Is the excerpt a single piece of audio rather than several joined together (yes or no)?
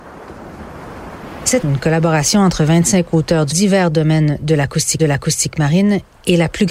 no